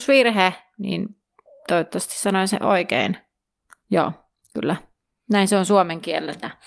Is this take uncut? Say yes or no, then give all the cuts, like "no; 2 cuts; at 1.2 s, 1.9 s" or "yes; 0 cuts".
yes; 0 cuts